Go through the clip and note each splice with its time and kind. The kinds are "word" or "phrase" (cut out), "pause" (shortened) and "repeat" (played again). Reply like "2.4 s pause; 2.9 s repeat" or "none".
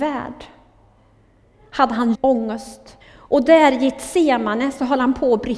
2.1 s word; 3.0 s pause